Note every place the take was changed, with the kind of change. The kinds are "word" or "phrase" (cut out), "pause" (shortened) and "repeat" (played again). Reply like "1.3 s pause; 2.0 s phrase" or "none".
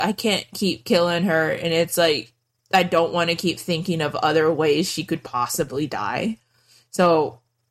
none